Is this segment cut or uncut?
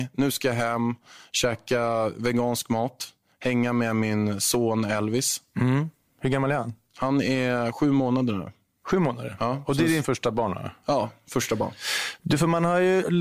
uncut